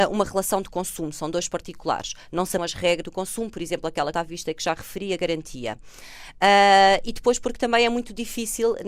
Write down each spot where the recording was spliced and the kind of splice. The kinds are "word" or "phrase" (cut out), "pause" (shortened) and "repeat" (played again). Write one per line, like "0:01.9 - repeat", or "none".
0:02.6 - word
0:03.0 - phrase
0:04.1 - word